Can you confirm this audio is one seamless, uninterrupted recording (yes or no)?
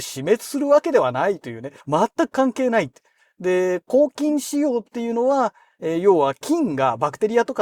no